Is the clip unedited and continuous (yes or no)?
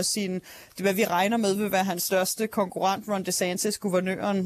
yes